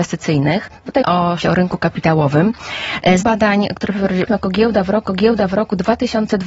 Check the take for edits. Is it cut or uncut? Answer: cut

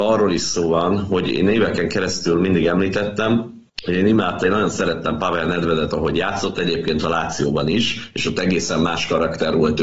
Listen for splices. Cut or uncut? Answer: cut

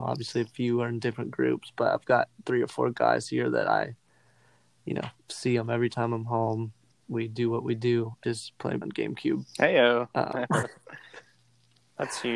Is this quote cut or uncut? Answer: cut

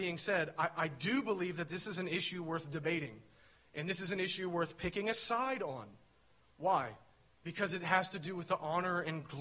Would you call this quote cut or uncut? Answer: uncut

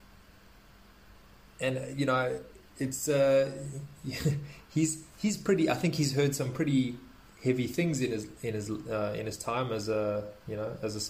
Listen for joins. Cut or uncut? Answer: uncut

